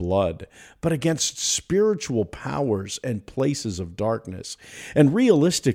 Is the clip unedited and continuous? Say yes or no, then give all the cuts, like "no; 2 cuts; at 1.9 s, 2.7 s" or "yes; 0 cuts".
yes; 0 cuts